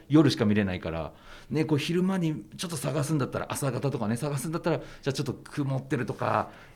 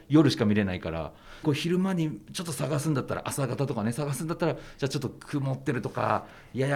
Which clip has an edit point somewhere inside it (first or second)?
second